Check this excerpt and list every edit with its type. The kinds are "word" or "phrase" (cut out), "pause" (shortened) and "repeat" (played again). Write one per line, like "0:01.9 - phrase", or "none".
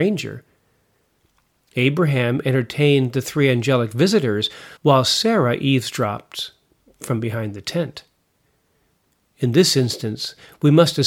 0:04.8 - pause